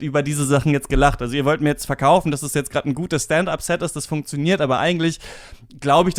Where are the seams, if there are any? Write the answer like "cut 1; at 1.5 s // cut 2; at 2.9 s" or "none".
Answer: none